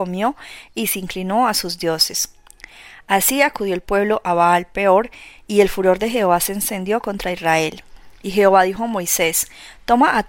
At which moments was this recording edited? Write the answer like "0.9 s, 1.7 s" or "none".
none